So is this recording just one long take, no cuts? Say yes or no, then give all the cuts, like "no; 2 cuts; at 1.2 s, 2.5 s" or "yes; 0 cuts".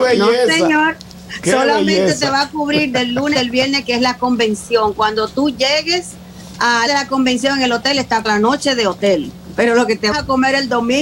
no; 5 cuts; at 2.9 s, 3.3 s, 6.9 s, 8.2 s, 10.1 s